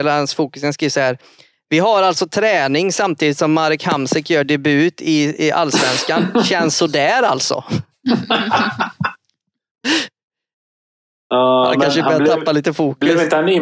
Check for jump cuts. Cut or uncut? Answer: uncut